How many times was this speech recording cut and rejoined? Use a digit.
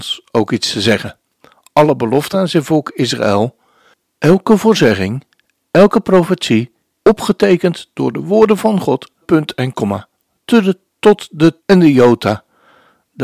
4